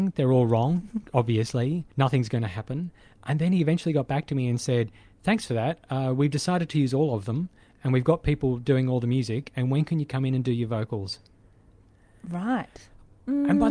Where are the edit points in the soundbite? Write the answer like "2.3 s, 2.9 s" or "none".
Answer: 1.9 s